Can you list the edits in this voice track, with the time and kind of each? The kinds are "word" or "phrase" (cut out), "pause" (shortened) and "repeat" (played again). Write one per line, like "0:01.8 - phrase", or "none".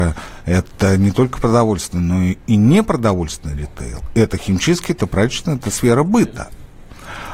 none